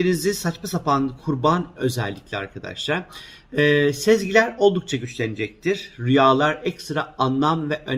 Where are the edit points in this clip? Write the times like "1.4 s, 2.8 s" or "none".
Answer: 1.2 s, 1.8 s